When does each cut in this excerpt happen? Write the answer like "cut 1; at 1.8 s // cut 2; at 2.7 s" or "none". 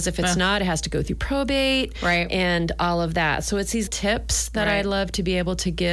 cut 1; at 3.9 s

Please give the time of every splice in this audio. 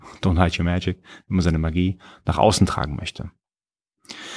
none

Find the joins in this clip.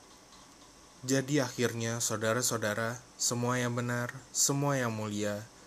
cut 1; at 3.1 s

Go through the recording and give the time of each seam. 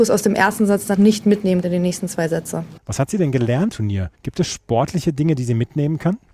cut 1; at 0.9 s // cut 2; at 1.6 s // cut 3; at 2.8 s // cut 4; at 3.7 s // cut 5; at 4.1 s

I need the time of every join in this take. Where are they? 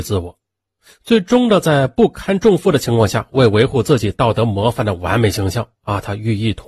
none

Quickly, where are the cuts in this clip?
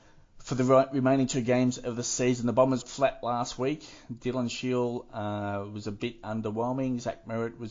cut 1; at 2.8 s

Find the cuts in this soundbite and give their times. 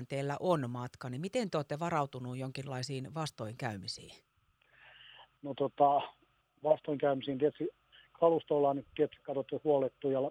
none

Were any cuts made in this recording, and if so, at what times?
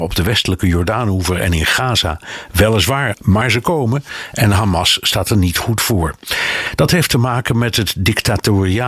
cut 1; at 3.1 s

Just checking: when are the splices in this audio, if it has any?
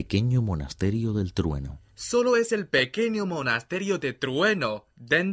cut 1; at 1.8 s

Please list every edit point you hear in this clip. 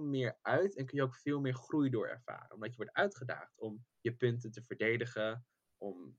cut 1; at 3.9 s

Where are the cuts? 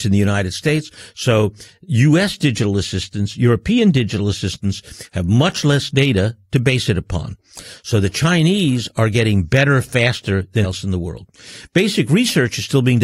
cut 1; at 10.6 s

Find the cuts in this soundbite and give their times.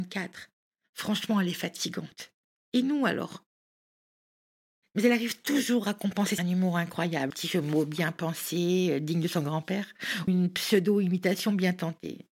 cut 1; at 6.4 s // cut 2; at 7.3 s // cut 3; at 10.3 s

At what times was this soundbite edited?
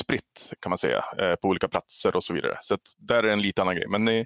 none

